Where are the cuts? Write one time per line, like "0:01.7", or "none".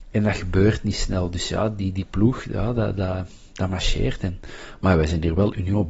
none